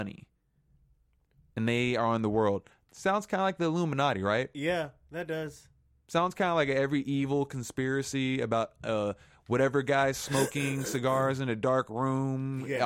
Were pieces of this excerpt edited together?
no; 0 cuts

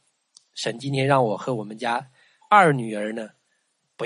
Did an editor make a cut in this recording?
no; 0 cuts

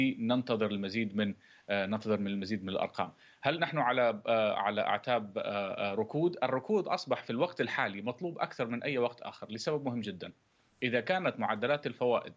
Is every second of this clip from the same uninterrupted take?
yes; 0 cuts

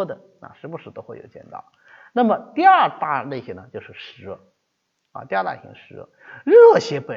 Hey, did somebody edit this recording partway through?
no; 0 cuts

